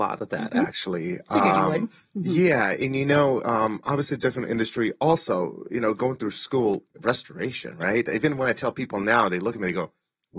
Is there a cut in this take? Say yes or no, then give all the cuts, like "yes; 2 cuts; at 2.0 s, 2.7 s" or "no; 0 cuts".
yes; 1 cut; at 6.9 s